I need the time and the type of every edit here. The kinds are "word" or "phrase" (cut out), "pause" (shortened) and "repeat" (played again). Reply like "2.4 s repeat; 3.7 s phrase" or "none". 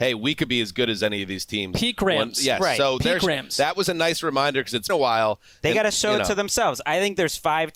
4.9 s word